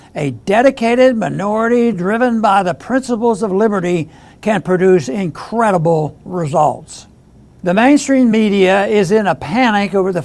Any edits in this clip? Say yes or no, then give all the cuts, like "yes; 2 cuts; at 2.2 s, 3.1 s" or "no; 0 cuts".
no; 0 cuts